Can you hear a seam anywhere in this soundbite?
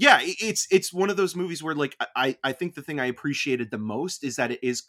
no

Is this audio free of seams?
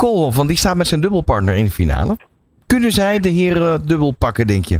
yes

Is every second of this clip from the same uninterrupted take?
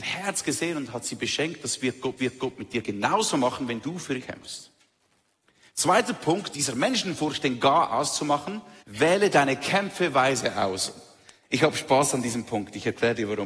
no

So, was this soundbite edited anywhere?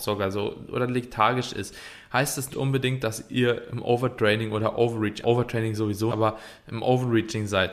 yes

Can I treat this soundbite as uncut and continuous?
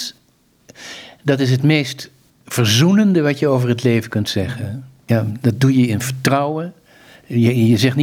yes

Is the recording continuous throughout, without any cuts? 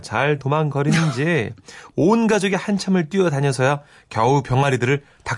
yes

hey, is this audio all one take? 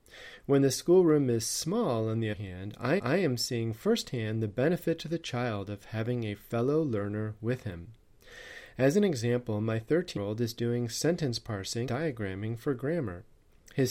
no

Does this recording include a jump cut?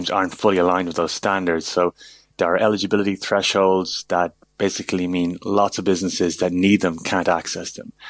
no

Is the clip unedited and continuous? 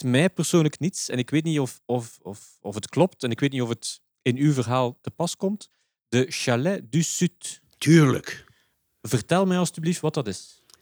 yes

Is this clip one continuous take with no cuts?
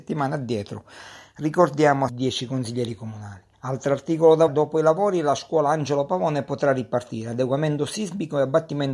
no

